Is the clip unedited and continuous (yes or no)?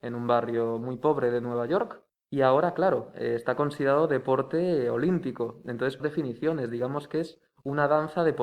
no